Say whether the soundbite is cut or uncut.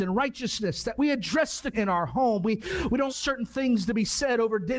cut